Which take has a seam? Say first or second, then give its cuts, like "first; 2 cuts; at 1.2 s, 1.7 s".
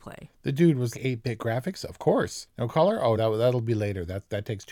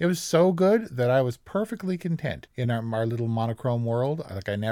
first; 2 cuts; at 0.9 s, 3.2 s